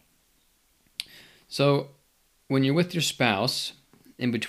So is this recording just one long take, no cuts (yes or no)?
yes